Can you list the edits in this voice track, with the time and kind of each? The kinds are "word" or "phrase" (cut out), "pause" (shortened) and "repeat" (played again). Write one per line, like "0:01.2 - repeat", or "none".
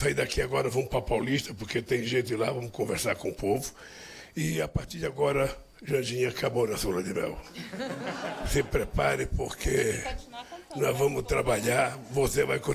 none